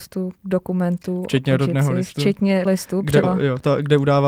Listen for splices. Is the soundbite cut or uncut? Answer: cut